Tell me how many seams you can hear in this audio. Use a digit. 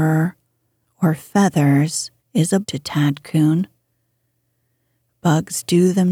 2